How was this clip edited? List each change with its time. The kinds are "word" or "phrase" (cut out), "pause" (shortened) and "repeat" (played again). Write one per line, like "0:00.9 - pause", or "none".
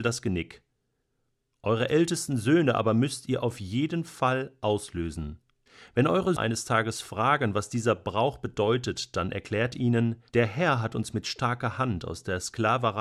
0:05.7 - pause
0:06.4 - word
0:10.3 - pause